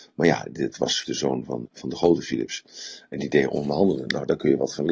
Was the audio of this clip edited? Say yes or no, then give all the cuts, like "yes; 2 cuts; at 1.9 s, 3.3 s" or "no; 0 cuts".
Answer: yes; 2 cuts; at 1.0 s, 1.6 s